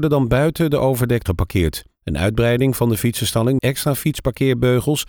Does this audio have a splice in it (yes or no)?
yes